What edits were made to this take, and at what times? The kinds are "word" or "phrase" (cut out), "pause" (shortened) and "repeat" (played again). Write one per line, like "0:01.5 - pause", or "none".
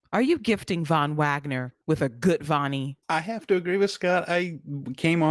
0:01.8 - pause
0:03.0 - pause